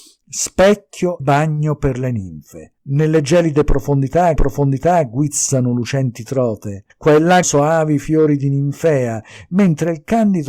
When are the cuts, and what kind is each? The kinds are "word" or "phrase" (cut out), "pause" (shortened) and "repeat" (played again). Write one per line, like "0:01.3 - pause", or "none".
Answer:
0:01.2 - word
0:02.8 - pause
0:04.4 - repeat
0:06.9 - pause
0:07.4 - word